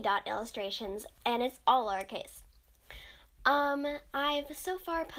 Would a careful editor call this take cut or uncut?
uncut